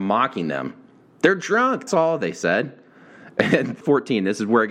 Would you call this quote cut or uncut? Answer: cut